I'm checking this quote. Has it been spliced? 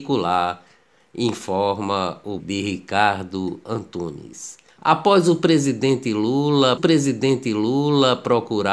yes; 3 cuts; at 2.4 s, 4.7 s, 6.8 s

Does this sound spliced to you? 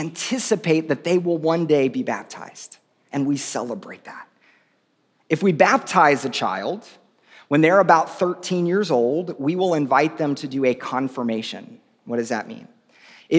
no; 0 cuts

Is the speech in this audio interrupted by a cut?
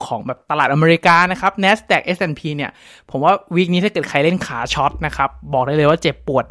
no; 0 cuts

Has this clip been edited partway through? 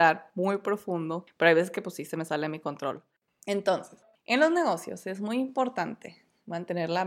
no; 0 cuts

